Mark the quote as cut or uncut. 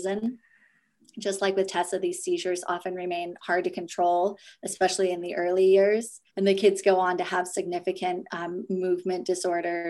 cut